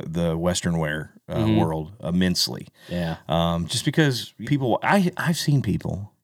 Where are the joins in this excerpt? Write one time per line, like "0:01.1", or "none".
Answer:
0:04.4